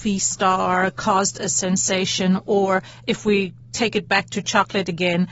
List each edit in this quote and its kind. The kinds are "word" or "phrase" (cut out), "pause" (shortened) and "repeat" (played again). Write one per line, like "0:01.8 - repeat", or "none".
none